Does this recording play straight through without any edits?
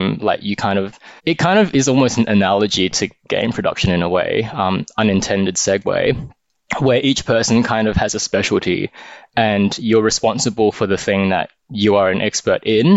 no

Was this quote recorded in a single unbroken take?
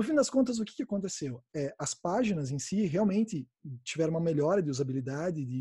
no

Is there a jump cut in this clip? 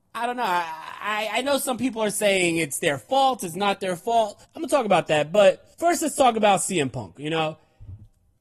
yes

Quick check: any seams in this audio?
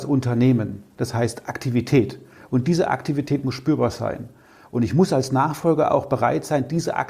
no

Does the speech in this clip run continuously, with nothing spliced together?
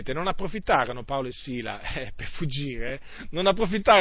yes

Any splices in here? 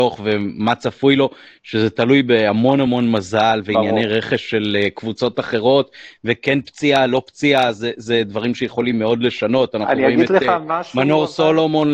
no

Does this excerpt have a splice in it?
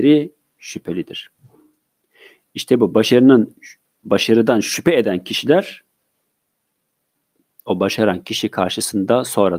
no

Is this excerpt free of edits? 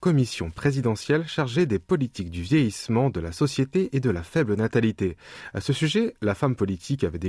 yes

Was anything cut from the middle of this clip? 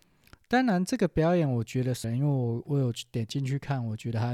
yes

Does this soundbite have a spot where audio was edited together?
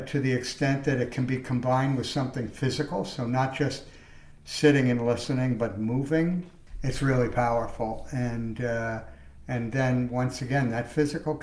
no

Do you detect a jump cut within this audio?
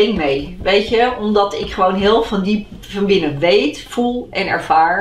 no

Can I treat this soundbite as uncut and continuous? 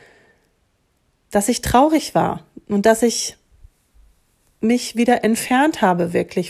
yes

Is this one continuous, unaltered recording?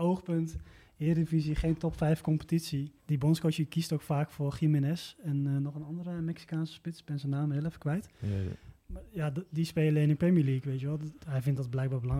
no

